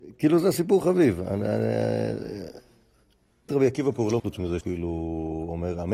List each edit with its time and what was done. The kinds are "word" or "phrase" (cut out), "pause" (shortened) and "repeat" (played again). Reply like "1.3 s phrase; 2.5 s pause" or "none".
3.5 s word; 4.2 s word; 4.6 s word